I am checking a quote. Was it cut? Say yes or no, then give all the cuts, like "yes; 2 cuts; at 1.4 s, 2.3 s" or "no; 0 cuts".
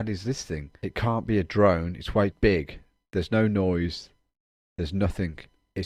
yes; 1 cut; at 2.3 s